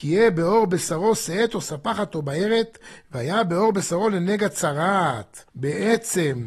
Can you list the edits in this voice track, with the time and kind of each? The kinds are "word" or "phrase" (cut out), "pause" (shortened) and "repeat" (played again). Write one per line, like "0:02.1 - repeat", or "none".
0:05.5 - pause

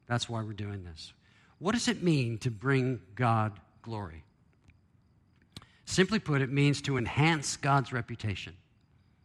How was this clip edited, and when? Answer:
none

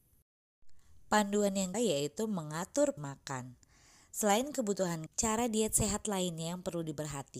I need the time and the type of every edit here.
0:01.7 - word
0:03.0 - word
0:05.1 - word

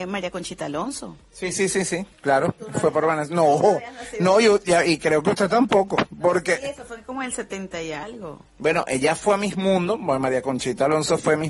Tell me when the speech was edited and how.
none

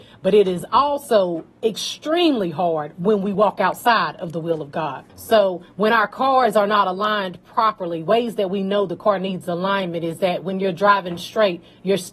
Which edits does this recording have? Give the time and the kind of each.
0:01.5 - pause
0:05.1 - pause

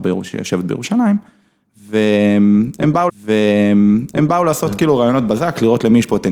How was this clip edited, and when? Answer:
0:03.1 - repeat

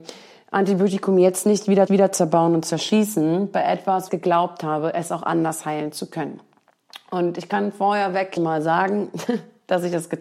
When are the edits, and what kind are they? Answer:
0:01.9 - repeat
0:04.1 - phrase
0:08.4 - word

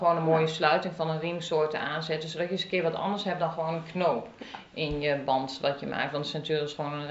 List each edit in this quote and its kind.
none

